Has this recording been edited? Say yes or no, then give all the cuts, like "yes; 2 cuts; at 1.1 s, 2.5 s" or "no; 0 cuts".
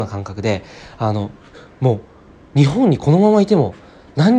no; 0 cuts